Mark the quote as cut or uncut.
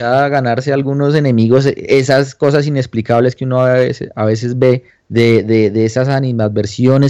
cut